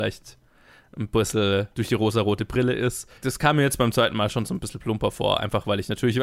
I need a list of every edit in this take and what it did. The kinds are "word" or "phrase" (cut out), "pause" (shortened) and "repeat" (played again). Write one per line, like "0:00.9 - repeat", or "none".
0:03.2 - pause